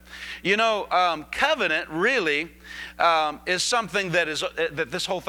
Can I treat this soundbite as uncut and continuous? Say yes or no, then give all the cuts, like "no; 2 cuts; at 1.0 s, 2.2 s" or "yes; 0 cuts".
yes; 0 cuts